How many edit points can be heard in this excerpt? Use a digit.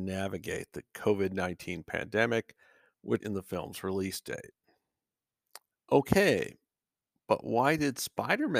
1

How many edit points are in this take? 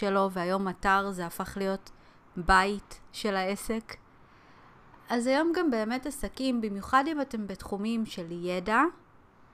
0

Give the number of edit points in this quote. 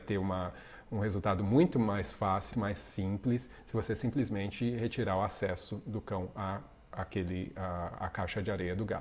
1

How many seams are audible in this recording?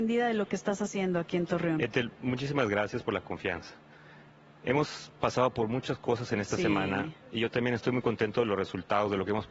1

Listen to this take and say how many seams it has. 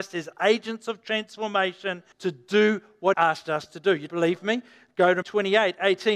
4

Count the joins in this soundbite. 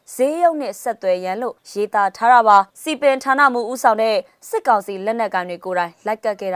2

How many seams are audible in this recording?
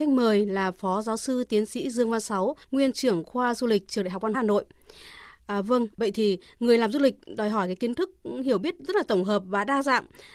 2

